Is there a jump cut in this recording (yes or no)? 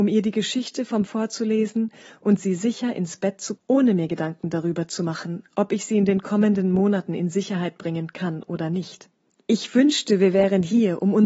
yes